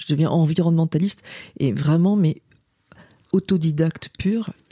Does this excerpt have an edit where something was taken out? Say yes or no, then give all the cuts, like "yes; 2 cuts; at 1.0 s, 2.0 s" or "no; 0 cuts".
no; 0 cuts